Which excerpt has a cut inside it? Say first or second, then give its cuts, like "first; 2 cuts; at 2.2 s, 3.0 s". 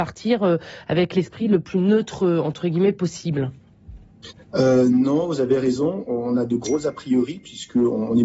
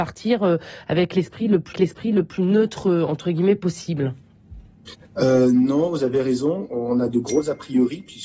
second; 1 cut; at 1.7 s